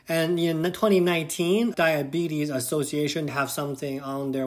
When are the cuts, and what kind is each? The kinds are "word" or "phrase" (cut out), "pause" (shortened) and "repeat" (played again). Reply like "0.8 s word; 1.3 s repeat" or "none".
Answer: 1.7 s word; 3.3 s phrase